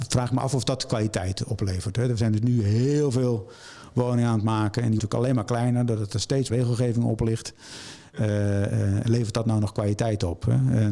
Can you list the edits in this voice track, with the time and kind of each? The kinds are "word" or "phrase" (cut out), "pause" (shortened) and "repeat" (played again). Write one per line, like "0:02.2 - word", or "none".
0:05.0 - word
0:06.5 - word
0:09.0 - word